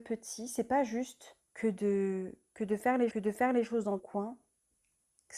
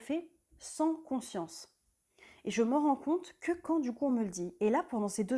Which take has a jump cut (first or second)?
first